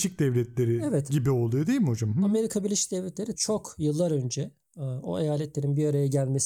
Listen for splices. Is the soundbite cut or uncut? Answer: cut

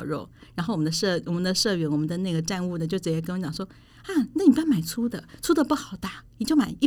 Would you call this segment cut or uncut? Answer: uncut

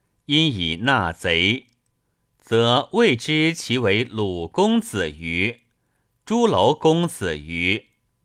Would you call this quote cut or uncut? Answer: uncut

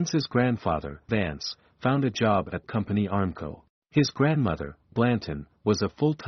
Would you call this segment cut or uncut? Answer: cut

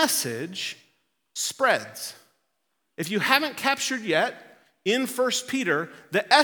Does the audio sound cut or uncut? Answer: uncut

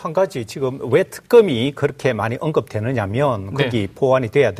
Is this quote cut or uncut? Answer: uncut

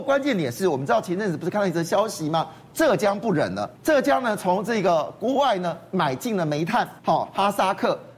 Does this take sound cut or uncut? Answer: cut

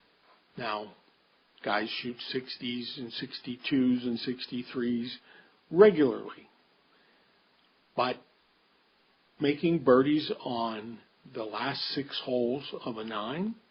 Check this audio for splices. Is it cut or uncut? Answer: uncut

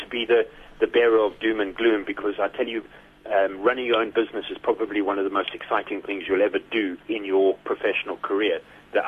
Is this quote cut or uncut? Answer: cut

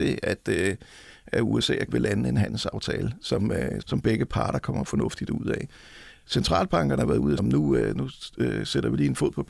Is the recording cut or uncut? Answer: cut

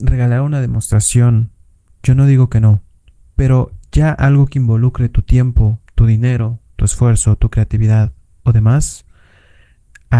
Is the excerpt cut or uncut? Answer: uncut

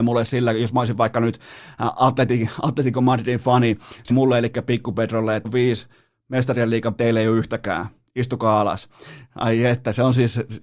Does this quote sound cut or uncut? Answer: cut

